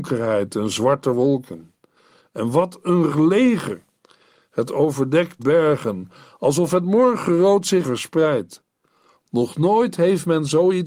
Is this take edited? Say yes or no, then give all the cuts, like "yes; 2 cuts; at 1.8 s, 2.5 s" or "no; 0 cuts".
yes; 3 cuts; at 3.1 s, 5.4 s, 7.8 s